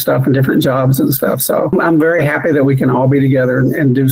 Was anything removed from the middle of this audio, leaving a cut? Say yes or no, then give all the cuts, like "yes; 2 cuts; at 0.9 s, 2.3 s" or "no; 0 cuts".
no; 0 cuts